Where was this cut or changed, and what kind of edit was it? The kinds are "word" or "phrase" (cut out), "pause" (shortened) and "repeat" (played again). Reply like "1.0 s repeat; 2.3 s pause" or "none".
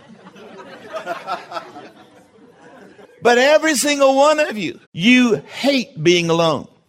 4.8 s pause

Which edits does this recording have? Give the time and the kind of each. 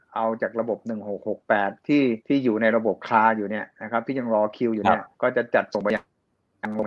2.2 s pause; 5.1 s pause

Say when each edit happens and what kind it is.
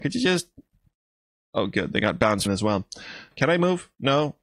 2.5 s phrase

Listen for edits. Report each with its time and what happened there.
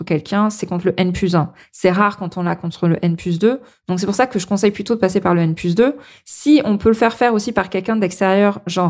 none

